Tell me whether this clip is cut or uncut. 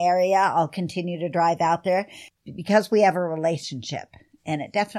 uncut